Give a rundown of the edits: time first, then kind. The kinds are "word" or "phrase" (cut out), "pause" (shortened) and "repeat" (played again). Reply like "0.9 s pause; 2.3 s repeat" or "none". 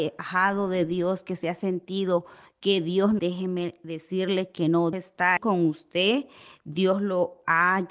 3.2 s phrase; 4.9 s word; 5.4 s word